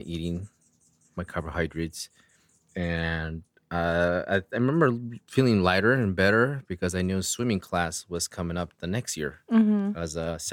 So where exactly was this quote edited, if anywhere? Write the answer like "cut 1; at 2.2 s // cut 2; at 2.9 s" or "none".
none